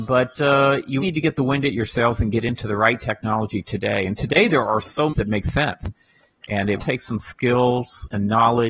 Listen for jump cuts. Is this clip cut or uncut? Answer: cut